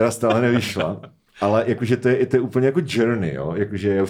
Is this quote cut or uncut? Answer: uncut